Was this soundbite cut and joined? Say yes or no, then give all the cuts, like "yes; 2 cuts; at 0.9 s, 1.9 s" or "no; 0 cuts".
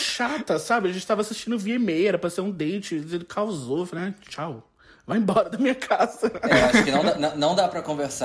no; 0 cuts